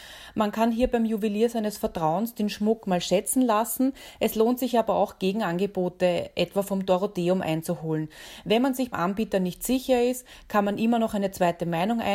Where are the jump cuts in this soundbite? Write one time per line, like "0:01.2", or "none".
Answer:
0:08.9